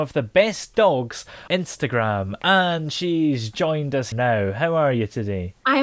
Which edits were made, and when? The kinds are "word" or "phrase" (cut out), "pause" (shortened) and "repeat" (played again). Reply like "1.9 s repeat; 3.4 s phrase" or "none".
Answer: 1.5 s word; 3.5 s word; 4.1 s word

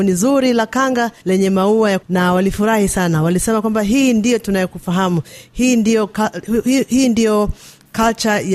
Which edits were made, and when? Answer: 1.2 s pause; 2.0 s word

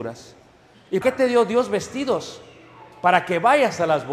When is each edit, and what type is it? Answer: 1.0 s word

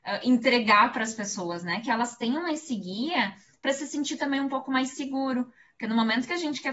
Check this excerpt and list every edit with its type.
none

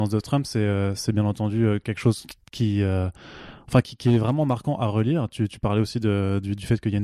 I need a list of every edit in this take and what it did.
2.4 s pause

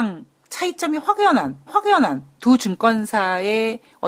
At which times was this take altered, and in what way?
1.7 s repeat

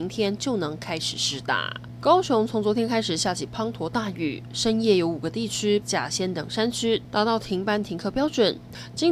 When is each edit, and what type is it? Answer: 5.8 s phrase

